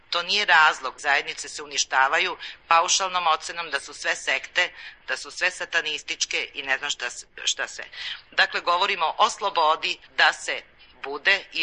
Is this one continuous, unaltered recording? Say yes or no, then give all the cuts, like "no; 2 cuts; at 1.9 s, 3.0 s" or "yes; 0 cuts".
no; 2 cuts; at 1.0 s, 10.1 s